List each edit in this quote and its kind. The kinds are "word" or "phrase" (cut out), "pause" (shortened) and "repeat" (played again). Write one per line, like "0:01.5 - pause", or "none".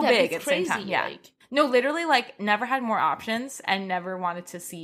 none